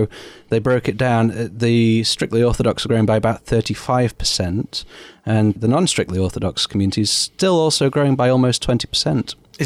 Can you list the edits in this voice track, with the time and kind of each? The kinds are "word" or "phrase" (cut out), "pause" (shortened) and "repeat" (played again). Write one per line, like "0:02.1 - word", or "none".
none